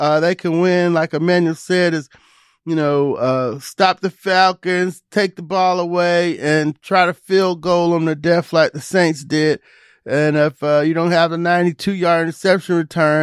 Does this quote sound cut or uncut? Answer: uncut